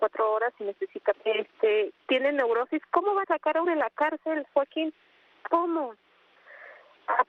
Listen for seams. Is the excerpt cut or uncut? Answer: cut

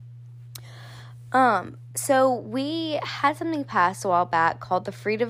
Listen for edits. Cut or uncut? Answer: uncut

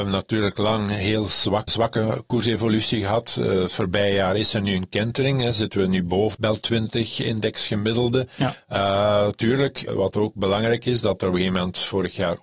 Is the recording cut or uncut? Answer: cut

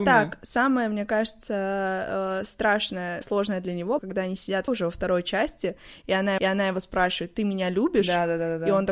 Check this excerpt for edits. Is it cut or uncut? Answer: cut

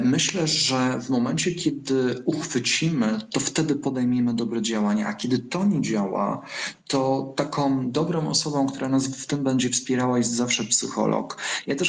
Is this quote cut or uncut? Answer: uncut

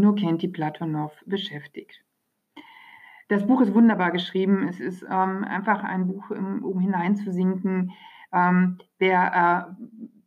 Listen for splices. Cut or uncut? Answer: uncut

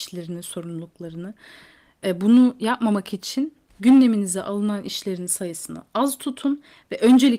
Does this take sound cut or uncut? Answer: cut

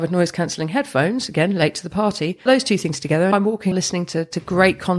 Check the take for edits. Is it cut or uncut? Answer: cut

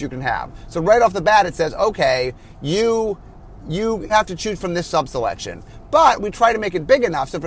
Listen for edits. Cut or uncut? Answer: cut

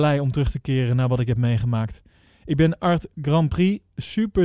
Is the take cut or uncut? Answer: uncut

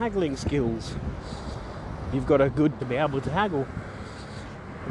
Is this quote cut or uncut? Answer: cut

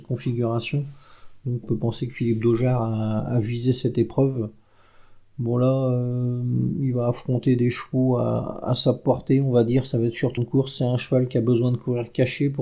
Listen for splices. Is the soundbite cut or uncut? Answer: cut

